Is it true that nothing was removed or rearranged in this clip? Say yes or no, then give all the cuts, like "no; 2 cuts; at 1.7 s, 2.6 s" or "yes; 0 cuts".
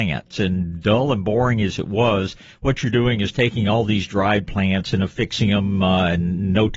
yes; 0 cuts